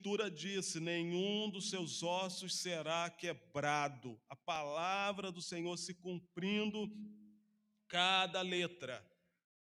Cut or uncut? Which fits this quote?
uncut